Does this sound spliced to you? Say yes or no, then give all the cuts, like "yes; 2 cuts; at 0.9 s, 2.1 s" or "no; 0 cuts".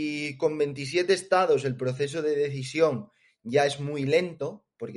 no; 0 cuts